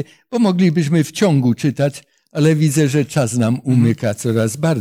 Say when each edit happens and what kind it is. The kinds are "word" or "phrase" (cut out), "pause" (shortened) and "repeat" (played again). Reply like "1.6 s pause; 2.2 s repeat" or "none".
none